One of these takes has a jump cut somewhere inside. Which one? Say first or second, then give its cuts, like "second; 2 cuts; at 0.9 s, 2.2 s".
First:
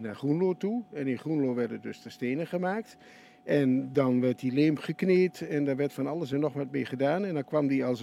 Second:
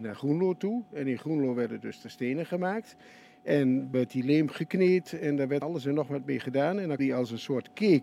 second; 3 cuts; at 3.9 s, 5.6 s, 7.0 s